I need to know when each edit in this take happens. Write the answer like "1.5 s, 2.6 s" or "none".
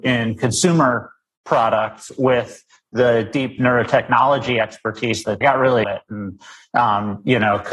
5.4 s, 5.8 s